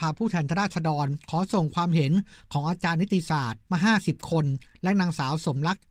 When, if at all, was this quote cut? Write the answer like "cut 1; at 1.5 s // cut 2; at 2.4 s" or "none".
cut 1; at 3.7 s